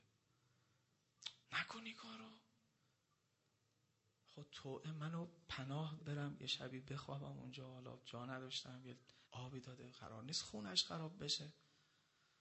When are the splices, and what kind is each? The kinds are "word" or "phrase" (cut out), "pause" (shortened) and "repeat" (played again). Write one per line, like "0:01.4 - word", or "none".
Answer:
0:01.4 - pause
0:06.0 - word
0:09.2 - pause